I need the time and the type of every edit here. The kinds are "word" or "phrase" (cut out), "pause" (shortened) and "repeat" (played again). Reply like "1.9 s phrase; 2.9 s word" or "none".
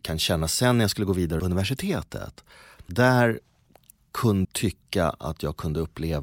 1.4 s word; 2.9 s word; 4.4 s word